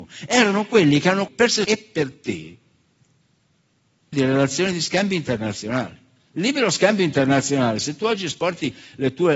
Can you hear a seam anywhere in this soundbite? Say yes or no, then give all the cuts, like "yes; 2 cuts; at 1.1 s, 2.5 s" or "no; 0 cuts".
yes; 3 cuts; at 1.3 s, 1.6 s, 4.1 s